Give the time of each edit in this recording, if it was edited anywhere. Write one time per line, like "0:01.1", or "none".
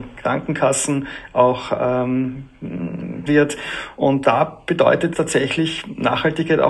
0:03.3
0:04.2
0:05.1